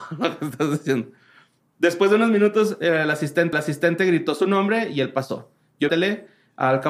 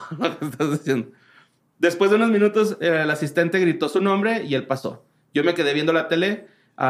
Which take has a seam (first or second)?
first